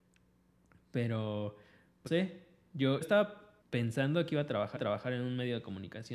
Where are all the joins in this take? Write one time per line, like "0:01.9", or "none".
0:02.1
0:03.0
0:03.6
0:04.8